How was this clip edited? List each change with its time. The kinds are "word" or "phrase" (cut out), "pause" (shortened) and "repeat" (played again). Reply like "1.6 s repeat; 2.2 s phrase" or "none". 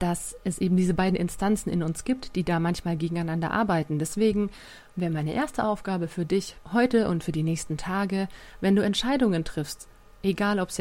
6.6 s pause

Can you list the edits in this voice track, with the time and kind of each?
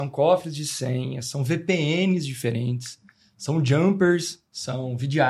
none

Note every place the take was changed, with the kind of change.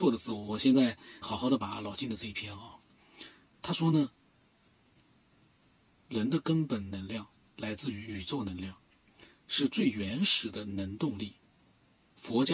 1.2 s word

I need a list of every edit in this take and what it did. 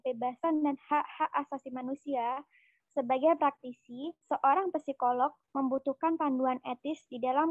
4.2 s pause

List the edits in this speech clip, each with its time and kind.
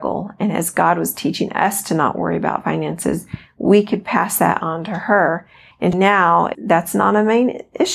none

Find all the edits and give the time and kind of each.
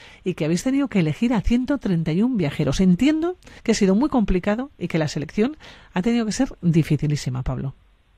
3.6 s pause

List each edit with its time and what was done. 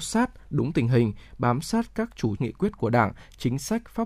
2.4 s word

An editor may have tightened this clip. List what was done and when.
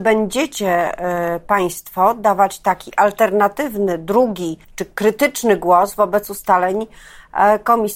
4.6 s pause

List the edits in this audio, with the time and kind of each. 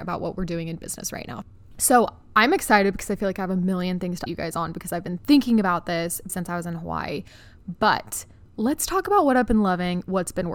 4.3 s word; 6.3 s word

